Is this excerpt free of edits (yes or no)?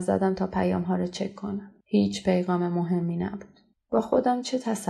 no